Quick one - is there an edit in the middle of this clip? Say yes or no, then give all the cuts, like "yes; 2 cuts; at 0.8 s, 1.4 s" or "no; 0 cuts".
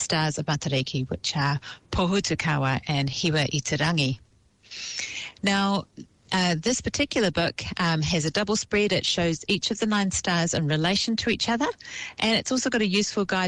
no; 0 cuts